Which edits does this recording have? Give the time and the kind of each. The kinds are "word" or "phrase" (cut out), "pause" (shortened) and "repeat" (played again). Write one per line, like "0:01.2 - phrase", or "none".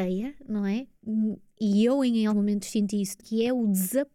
0:02.3 - word
0:03.2 - word